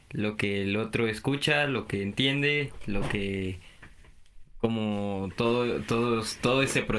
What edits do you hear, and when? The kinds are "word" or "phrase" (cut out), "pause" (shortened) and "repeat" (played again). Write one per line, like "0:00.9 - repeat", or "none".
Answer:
none